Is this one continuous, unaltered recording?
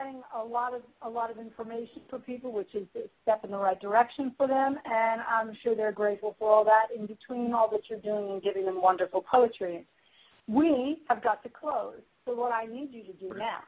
yes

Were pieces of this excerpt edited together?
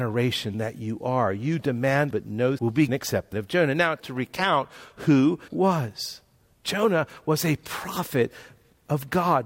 yes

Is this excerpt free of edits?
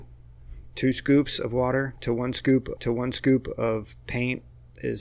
no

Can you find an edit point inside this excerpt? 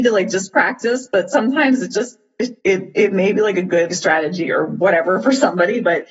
yes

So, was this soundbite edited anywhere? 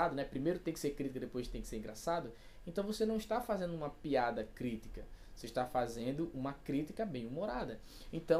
no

